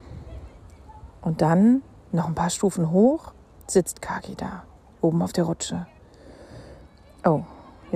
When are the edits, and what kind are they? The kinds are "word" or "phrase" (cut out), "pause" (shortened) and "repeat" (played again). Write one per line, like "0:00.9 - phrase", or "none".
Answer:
none